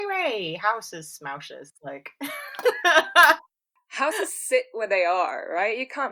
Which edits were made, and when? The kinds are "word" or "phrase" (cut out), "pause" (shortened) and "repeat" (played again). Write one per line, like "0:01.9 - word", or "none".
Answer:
none